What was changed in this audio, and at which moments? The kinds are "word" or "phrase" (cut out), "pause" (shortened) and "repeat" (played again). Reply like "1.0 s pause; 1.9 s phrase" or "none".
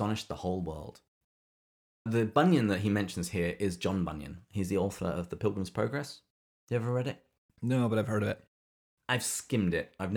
none

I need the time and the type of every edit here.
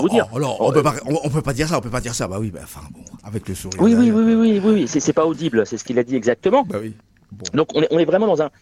7.0 s pause

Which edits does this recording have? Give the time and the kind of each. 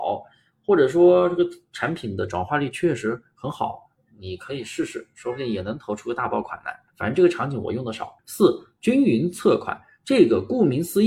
3.9 s pause; 6.9 s pause; 8.2 s pause

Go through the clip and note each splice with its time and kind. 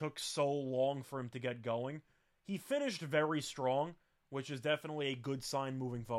none

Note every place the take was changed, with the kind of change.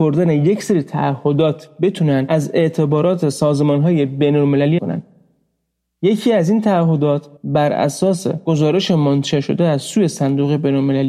4.8 s word; 7.4 s pause

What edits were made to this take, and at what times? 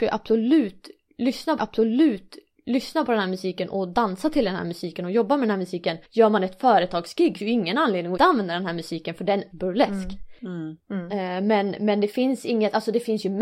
1.6 s repeat; 6.0 s pause; 7.4 s word; 8.2 s word; 9.5 s phrase

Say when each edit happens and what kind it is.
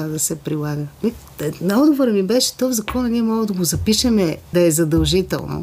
4.5 s word

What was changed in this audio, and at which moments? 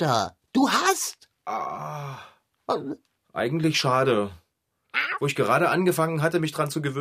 none

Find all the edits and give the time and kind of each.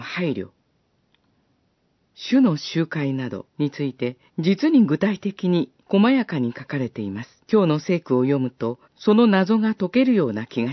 3.5 s pause; 4.3 s pause; 5.8 s pause; 7.4 s pause; 8.8 s pause

